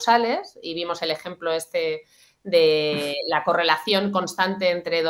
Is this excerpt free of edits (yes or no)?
yes